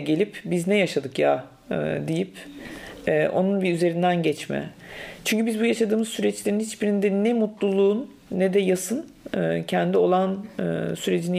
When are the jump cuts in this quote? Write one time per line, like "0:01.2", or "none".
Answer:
none